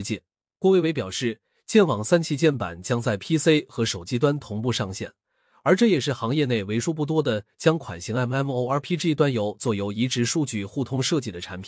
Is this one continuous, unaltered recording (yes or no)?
yes